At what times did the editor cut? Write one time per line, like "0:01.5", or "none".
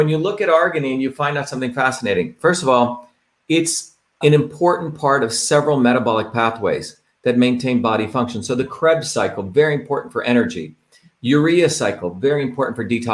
0:04.2